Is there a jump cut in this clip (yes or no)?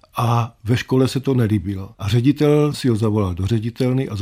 yes